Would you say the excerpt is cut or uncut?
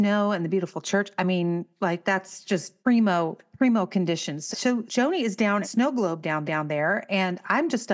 cut